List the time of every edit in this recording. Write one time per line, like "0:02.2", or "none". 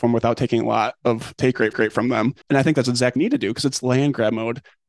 0:01.7
0:02.4
0:03.2

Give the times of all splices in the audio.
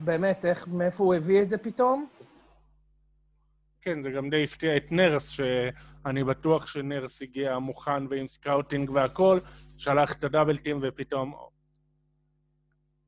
none

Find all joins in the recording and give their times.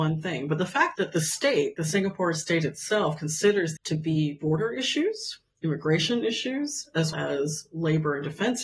0:03.8
0:07.1

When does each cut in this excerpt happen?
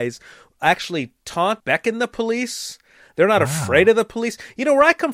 0:01.6

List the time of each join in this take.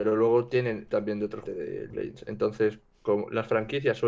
0:00.9
0:01.4
0:01.9
0:02.8

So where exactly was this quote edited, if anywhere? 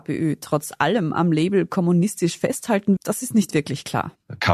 0:03.0

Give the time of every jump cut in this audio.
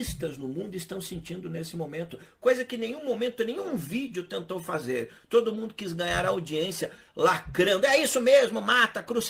none

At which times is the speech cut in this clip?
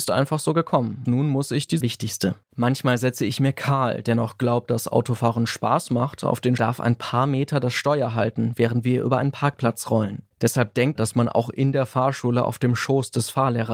0:01.1
0:01.8
0:02.4
0:06.6
0:11.0

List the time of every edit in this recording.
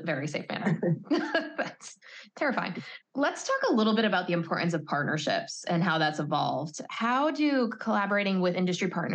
0:03.0

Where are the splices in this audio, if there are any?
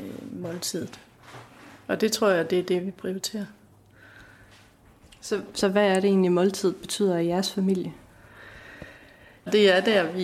none

